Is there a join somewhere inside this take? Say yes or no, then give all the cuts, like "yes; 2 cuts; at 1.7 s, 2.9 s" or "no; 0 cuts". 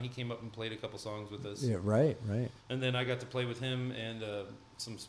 yes; 1 cut; at 2.6 s